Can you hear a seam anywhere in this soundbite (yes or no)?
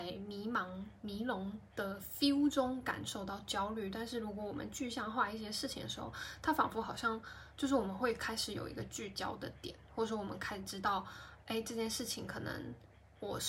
no